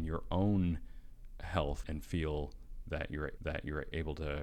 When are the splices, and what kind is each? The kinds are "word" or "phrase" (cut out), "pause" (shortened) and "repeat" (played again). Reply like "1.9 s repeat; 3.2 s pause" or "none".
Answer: 1.8 s word; 3.4 s repeat